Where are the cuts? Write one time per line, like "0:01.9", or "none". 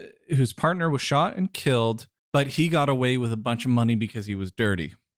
0:02.2